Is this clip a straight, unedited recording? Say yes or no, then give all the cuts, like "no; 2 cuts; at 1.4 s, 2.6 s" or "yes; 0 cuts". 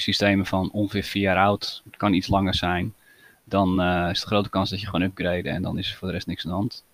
yes; 0 cuts